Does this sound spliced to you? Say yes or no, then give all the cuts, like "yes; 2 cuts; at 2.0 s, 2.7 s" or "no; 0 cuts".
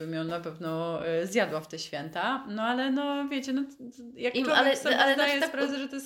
no; 0 cuts